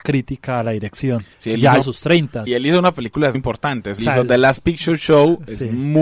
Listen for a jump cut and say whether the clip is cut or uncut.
cut